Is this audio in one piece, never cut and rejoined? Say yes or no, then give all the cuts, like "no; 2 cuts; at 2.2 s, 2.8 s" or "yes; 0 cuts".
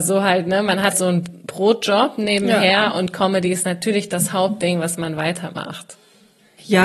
no; 1 cut; at 0.9 s